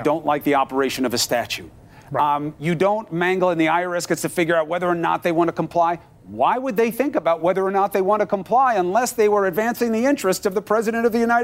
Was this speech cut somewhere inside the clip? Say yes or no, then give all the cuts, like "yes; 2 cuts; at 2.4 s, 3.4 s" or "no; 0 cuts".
no; 0 cuts